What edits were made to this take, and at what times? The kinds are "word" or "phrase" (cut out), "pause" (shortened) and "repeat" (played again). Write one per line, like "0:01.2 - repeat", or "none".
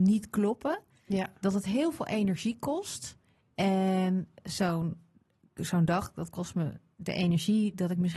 none

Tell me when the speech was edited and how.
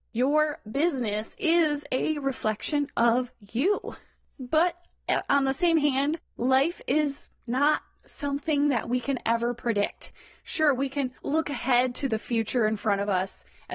0:11.2 - pause

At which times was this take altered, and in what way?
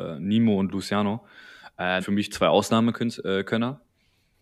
0:02.0 - word

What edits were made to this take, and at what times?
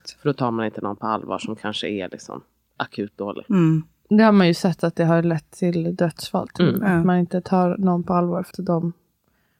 0:08.5 - word

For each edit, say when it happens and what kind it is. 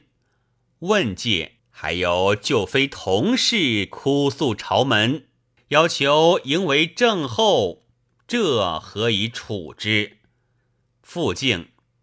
0:01.6 - pause

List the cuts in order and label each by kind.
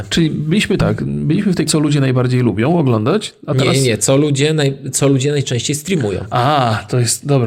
0:01.7 - word

